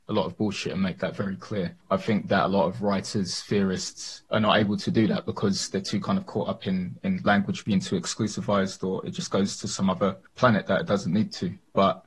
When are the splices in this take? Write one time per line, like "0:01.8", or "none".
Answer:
0:01.8
0:04.3
0:10.3